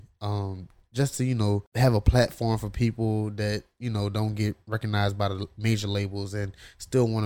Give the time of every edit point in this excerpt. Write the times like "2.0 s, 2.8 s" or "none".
none